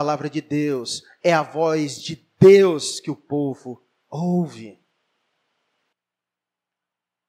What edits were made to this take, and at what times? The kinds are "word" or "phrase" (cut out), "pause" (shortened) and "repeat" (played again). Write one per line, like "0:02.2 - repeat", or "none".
none